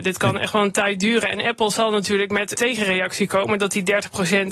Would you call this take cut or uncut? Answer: cut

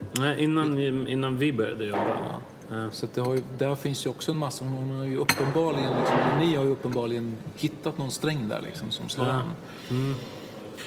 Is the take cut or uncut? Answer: uncut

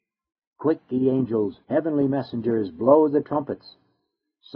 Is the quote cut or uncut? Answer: cut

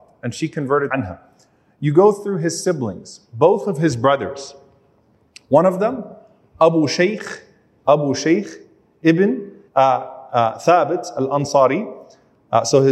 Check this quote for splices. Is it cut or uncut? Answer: cut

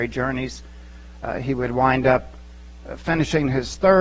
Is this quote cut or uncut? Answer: uncut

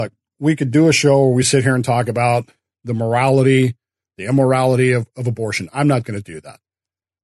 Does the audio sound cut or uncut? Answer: uncut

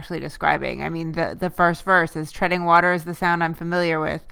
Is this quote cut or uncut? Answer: uncut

